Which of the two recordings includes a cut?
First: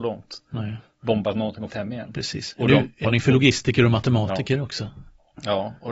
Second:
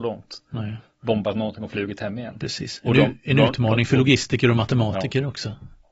first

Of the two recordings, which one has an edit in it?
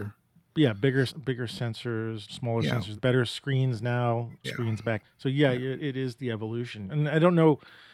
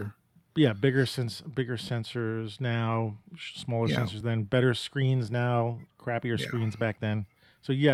first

